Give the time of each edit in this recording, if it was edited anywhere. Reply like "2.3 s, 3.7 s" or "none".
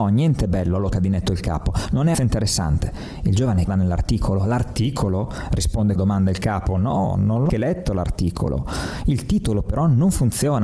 0.9 s, 2.1 s, 3.7 s, 6.0 s, 7.5 s